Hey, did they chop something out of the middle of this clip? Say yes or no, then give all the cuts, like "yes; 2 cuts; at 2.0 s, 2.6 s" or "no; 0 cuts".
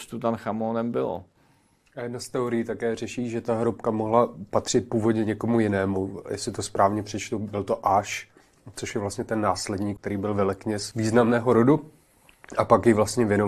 no; 0 cuts